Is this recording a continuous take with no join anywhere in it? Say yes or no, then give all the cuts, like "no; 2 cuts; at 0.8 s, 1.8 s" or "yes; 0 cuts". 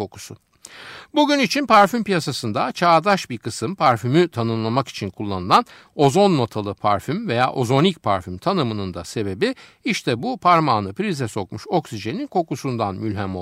yes; 0 cuts